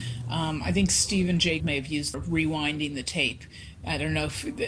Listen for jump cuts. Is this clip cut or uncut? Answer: cut